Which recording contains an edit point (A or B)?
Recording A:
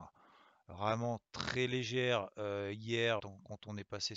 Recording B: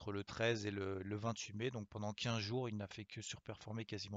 A